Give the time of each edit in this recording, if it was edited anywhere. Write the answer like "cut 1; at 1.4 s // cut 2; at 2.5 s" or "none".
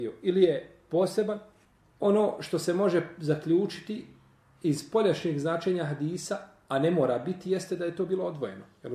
none